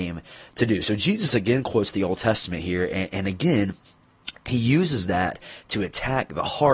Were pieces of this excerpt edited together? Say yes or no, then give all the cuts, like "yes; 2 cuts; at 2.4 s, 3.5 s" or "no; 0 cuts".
no; 0 cuts